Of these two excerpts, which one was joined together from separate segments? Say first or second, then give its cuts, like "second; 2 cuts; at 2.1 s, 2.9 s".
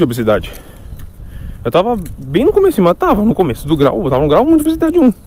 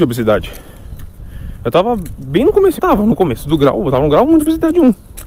second; 1 cut; at 2.8 s